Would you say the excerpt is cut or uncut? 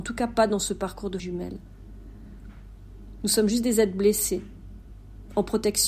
cut